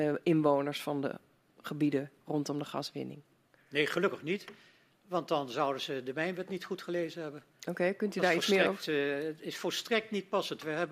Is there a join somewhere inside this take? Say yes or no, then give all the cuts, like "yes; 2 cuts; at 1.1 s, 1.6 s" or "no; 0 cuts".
no; 0 cuts